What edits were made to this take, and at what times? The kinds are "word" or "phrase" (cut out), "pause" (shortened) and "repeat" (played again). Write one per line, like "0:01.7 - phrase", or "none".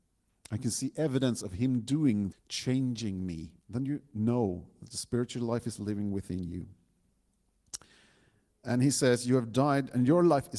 0:02.3 - word
0:03.6 - pause